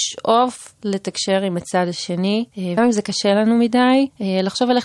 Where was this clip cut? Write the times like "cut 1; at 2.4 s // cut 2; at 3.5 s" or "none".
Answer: cut 1; at 2.8 s